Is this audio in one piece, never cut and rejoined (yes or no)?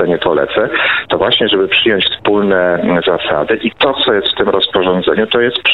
yes